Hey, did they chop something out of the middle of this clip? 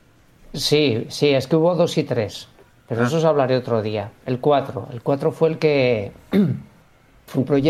no; 0 cuts

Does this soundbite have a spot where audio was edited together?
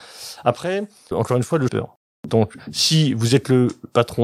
yes; 2 cuts; at 1.1 s, 1.7 s

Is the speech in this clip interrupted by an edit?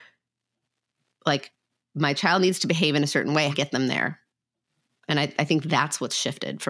yes; 2 cuts; at 3.5 s, 4.8 s

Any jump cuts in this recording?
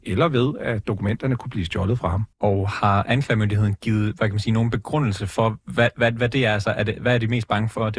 yes; 1 cut; at 2.3 s

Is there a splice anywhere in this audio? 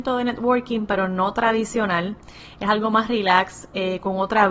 no; 0 cuts

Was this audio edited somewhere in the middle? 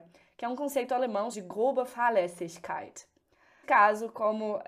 yes; 2 cuts; at 1.3 s, 3.6 s

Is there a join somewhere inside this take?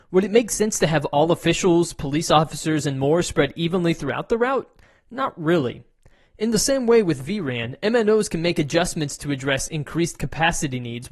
no; 0 cuts

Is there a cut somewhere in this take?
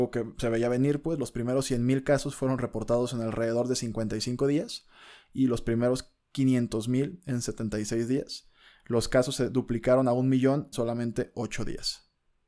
yes; 1 cut; at 10.7 s

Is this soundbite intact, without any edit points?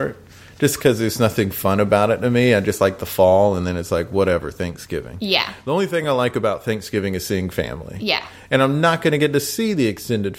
yes; 0 cuts

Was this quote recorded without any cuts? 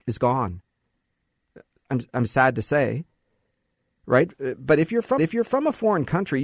no; 1 cut; at 5.2 s

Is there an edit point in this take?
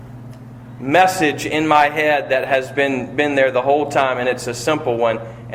no; 0 cuts

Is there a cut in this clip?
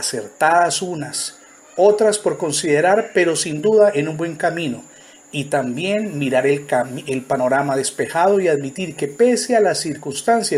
no; 0 cuts

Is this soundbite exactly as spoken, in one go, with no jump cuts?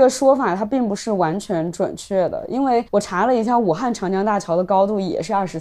no; 1 cut; at 2.9 s

